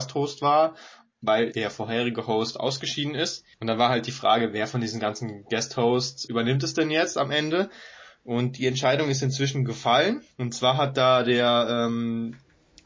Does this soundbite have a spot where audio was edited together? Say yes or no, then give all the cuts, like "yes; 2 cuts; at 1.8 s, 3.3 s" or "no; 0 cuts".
yes; 4 cuts; at 1.5 s, 3.5 s, 6.2 s, 10.3 s